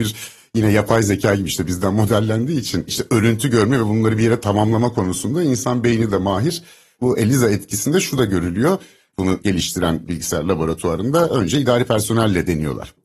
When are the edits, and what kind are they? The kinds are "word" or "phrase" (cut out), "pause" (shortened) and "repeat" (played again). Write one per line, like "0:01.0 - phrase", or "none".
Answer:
none

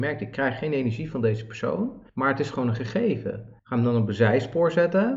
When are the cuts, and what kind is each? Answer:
0:02.1 - pause
0:03.6 - pause

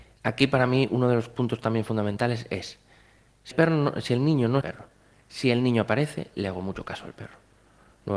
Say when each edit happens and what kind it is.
0:03.5 - word
0:04.6 - phrase

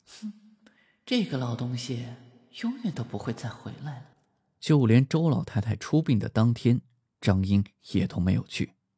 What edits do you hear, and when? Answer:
0:04.1 - pause

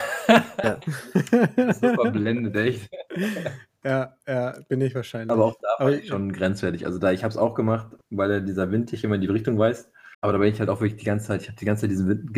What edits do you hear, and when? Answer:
0:10.1 - pause

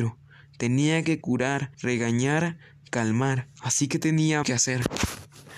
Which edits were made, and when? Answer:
0:01.2 - word
0:01.7 - pause
0:03.6 - word
0:04.4 - word

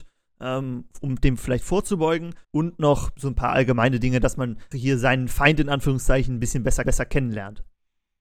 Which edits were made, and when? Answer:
0:02.4 - pause
0:04.7 - word
0:06.8 - repeat

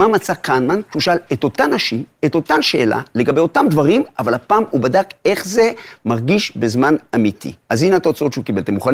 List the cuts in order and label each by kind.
0:07.6 - pause

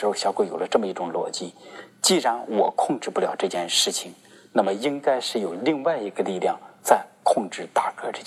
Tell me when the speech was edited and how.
none

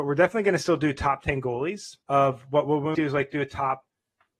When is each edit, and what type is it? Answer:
0:02.0 - pause
0:02.9 - word

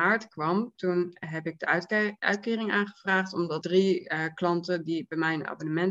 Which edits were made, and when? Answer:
0:03.6 - word

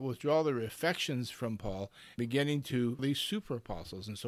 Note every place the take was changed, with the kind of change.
0:02.2 - word
0:03.0 - word

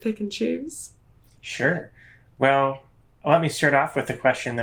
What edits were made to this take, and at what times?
none

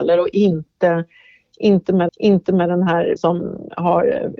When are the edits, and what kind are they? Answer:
0:02.1 - repeat
0:03.2 - word

